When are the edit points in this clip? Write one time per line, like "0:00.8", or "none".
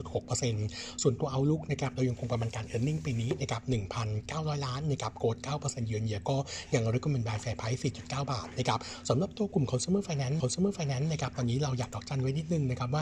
0:10.4